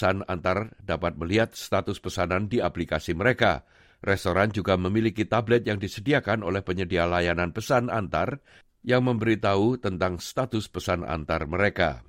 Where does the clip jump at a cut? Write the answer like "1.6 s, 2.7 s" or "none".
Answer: none